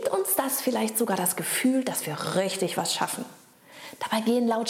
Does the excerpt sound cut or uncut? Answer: uncut